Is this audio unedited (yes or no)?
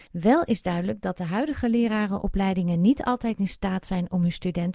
yes